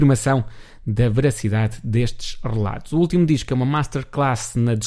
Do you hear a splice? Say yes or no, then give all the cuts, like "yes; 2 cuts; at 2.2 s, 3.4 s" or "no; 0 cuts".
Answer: no; 0 cuts